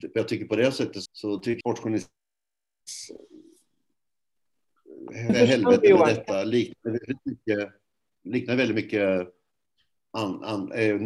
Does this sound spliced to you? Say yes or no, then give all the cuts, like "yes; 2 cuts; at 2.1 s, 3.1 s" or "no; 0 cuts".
yes; 2 cuts; at 1.1 s, 1.6 s